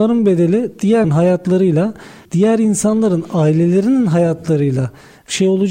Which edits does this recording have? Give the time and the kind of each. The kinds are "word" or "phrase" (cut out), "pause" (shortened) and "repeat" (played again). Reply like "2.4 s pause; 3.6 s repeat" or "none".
1.0 s word; 2.3 s word